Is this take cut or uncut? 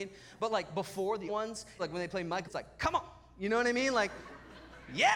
cut